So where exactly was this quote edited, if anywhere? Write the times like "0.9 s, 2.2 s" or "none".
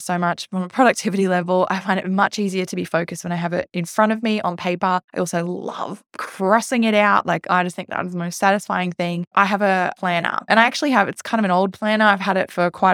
5.1 s